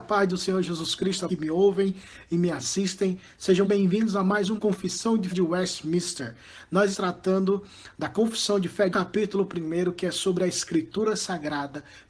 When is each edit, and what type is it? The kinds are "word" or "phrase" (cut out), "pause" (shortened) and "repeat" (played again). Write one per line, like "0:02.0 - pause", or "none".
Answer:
0:01.3 - phrase
0:03.6 - word
0:04.6 - word
0:05.3 - word
0:06.9 - word
0:08.9 - phrase